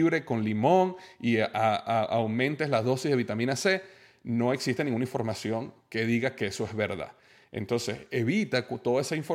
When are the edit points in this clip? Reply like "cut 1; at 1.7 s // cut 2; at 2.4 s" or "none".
none